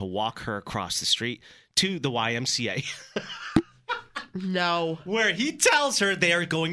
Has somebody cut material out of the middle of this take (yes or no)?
no